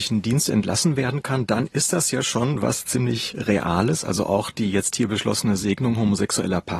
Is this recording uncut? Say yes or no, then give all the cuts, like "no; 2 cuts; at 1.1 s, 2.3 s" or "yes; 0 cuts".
yes; 0 cuts